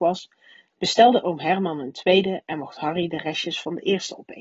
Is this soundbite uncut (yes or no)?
yes